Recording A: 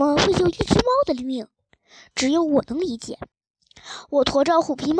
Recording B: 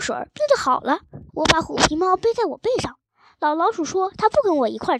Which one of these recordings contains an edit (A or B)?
B